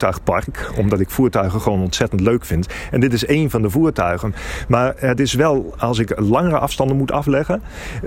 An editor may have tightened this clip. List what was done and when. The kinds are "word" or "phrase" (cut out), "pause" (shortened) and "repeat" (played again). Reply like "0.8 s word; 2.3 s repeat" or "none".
none